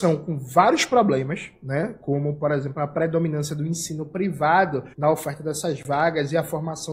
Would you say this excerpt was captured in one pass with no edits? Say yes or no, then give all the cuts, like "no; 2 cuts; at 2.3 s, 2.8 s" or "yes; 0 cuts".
no; 1 cut; at 4.9 s